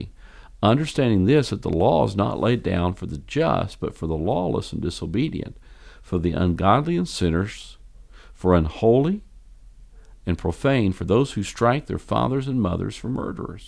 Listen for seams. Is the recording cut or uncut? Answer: uncut